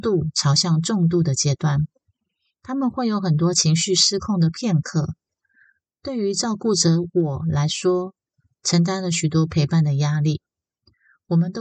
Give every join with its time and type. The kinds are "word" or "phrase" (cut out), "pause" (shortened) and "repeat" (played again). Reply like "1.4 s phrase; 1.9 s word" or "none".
none